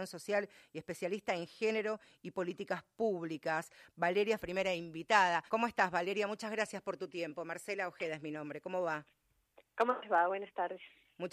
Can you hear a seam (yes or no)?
yes